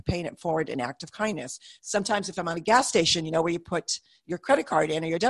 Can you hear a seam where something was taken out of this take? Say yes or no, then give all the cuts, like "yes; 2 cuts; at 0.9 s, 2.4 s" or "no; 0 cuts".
no; 0 cuts